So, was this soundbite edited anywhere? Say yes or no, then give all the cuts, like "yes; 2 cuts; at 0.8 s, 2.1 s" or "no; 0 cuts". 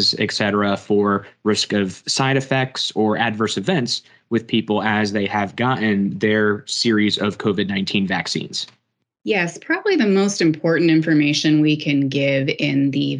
no; 0 cuts